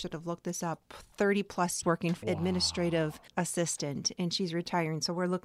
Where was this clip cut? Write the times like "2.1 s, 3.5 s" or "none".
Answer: 1.8 s, 2.2 s, 3.3 s